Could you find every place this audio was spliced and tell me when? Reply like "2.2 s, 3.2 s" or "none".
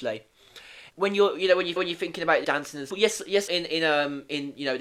0.9 s, 1.8 s, 2.4 s, 2.9 s, 3.5 s